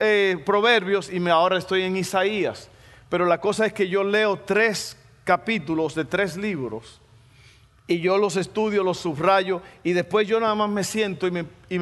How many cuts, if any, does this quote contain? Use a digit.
0